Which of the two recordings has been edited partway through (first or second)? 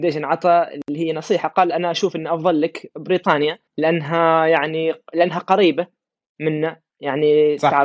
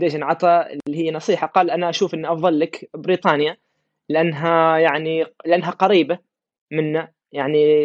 first